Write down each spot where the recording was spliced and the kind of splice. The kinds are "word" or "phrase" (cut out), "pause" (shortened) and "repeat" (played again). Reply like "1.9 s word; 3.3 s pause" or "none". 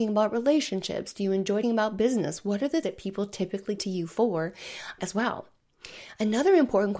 1.6 s word; 2.8 s word; 3.8 s word; 5.0 s word